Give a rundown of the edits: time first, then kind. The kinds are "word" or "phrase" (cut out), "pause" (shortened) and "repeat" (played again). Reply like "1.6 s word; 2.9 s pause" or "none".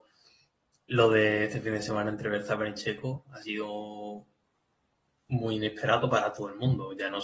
none

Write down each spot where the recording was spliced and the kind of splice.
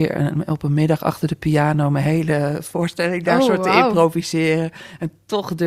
none

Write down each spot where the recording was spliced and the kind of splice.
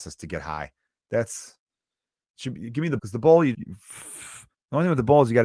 3.0 s word; 3.5 s word; 4.5 s word

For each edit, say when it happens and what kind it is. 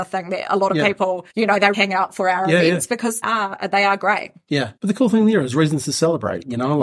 1.3 s pause; 1.7 s word; 3.2 s word; 4.8 s pause

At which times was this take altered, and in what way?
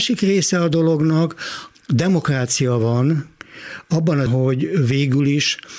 1.7 s phrase; 4.3 s word

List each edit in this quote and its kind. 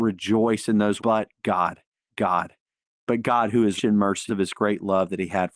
1.0 s word; 2.1 s repeat; 3.8 s word; 4.3 s word

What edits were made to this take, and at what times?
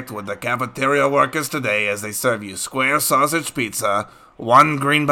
none

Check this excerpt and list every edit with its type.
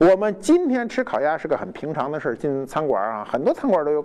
none

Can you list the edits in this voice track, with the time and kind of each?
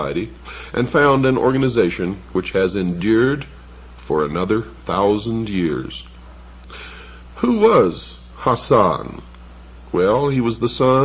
none

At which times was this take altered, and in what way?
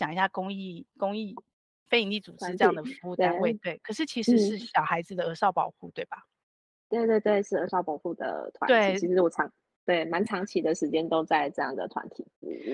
none

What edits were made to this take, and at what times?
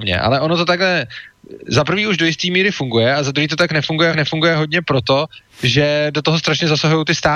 4.1 s repeat

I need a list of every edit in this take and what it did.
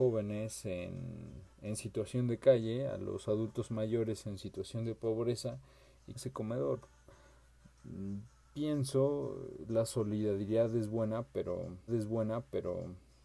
1.5 s pause; 6.2 s phrase; 11.9 s repeat

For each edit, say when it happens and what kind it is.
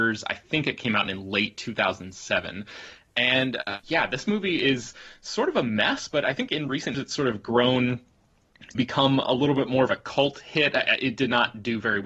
3.8 s word; 6.9 s word; 8.7 s word

